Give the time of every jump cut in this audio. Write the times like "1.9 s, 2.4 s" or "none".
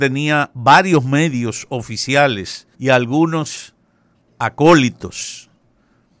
2.7 s